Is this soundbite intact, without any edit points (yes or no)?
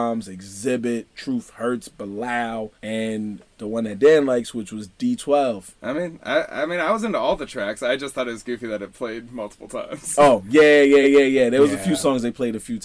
no